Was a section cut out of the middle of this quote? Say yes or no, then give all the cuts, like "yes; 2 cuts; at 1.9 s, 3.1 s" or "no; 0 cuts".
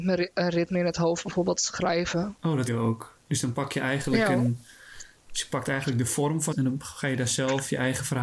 yes; 2 cuts; at 2.7 s, 6.5 s